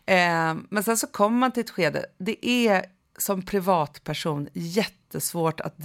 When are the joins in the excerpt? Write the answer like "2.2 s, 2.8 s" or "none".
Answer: none